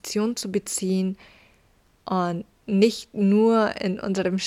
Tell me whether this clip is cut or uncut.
uncut